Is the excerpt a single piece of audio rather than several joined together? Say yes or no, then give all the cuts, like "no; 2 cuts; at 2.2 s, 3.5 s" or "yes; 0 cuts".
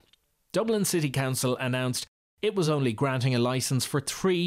yes; 0 cuts